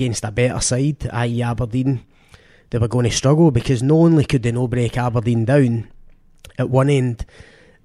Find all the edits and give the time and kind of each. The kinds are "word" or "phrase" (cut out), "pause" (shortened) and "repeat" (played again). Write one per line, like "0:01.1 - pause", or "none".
none